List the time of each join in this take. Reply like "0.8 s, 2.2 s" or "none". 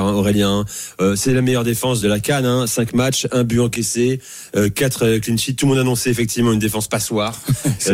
2.0 s